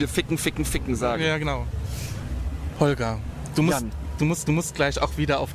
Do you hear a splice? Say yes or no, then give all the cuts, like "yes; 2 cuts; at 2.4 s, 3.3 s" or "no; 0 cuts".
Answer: yes; 1 cut; at 4.5 s